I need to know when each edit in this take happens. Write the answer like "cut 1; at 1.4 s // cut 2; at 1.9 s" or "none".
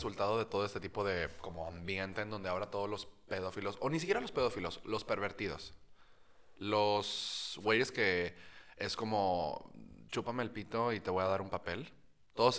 none